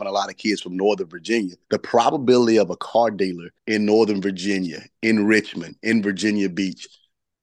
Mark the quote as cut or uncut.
cut